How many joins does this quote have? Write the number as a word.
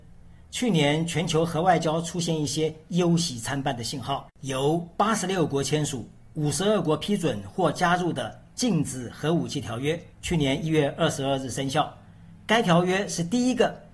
two